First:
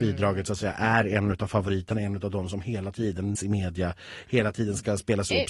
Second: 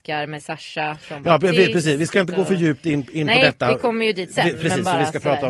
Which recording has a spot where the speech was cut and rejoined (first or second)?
first